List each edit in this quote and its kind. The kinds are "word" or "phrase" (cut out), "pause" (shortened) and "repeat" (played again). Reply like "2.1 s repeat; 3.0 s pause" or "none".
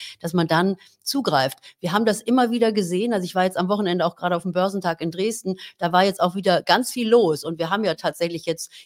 none